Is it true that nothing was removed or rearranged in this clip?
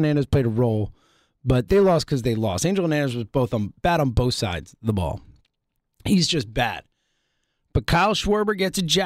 yes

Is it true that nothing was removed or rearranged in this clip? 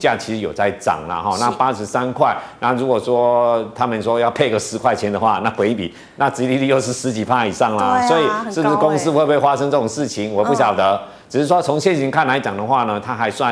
yes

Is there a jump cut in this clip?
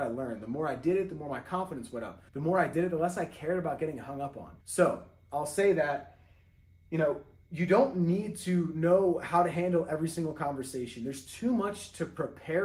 yes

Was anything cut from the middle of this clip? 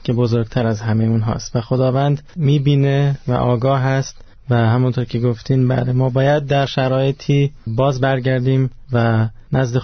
yes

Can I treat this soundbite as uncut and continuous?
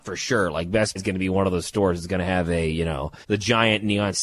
no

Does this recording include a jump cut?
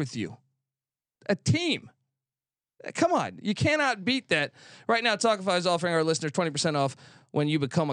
no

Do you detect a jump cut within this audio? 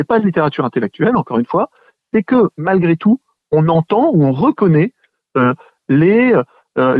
no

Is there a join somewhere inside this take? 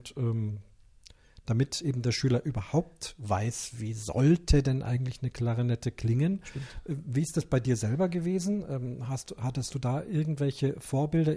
no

